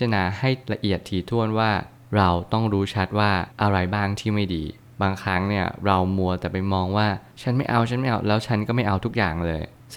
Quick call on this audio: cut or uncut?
cut